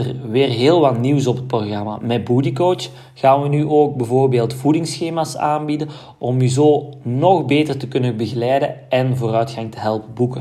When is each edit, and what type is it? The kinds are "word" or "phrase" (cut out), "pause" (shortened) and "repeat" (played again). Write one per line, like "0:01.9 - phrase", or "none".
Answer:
none